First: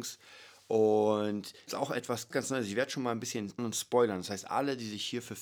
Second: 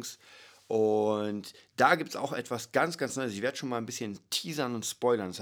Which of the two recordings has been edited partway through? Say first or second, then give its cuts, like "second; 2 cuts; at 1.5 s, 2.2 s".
first; 3 cuts; at 1.7 s, 2.3 s, 3.6 s